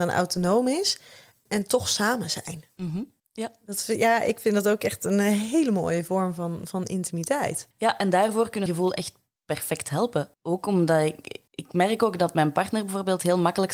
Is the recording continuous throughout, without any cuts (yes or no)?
no